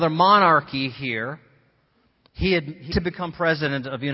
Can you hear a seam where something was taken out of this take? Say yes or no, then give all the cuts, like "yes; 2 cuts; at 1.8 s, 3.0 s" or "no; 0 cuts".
yes; 1 cut; at 2.9 s